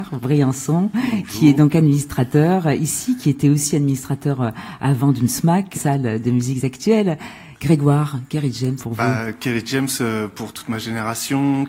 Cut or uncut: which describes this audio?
cut